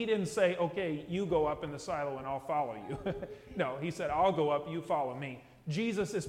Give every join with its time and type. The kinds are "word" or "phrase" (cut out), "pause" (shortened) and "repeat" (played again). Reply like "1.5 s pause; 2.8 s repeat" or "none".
none